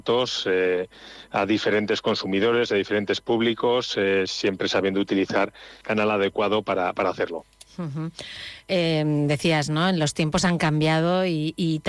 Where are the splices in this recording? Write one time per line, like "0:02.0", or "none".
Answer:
0:05.8